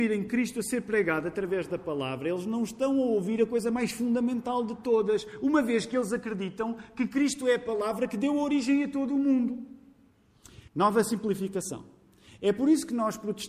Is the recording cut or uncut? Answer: cut